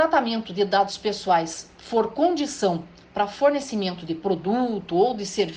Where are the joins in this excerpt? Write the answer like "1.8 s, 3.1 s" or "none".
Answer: none